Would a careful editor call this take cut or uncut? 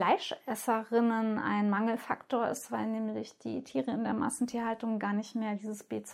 uncut